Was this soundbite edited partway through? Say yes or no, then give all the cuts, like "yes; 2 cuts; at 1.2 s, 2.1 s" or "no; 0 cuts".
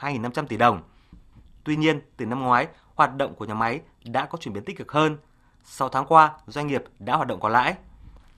no; 0 cuts